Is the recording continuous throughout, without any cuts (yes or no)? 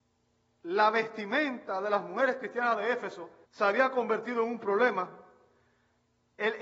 no